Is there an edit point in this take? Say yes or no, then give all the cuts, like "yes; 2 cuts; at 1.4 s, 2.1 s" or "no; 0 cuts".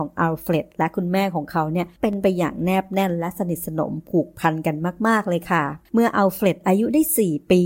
yes; 1 cut; at 5.8 s